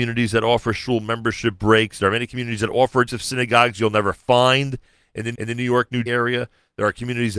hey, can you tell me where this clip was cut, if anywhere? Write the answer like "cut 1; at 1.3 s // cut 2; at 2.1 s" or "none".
cut 1; at 3.1 s // cut 2; at 5.3 s // cut 3; at 6.1 s